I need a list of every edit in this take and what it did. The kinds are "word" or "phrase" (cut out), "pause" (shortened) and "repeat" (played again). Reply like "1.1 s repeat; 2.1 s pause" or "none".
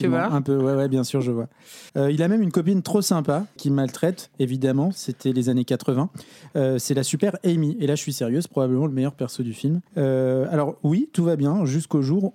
1.9 s pause; 3.6 s word; 9.9 s pause